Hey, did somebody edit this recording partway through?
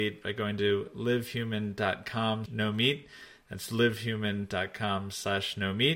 yes; 1 cut; at 2.5 s

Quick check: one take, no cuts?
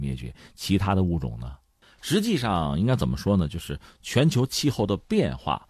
yes; 0 cuts

